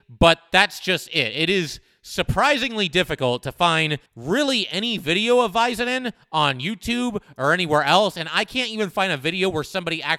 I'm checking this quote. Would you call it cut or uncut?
cut